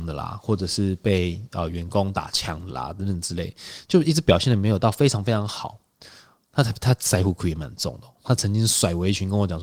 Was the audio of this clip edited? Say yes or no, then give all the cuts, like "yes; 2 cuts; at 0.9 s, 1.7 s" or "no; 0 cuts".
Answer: no; 0 cuts